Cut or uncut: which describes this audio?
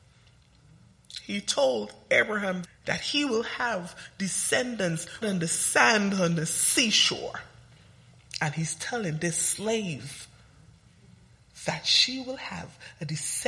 cut